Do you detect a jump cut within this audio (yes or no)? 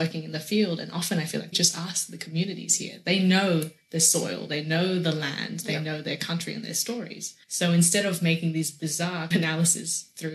yes